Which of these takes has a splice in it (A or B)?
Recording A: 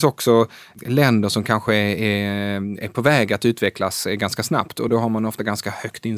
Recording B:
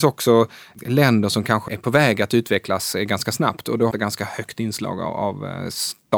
B